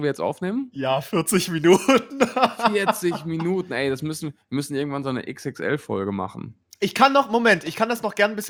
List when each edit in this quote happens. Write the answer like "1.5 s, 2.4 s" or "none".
none